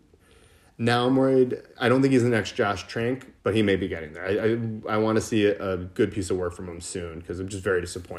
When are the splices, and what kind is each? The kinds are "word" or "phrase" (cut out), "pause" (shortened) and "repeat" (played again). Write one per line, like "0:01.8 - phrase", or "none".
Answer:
0:03.4 - pause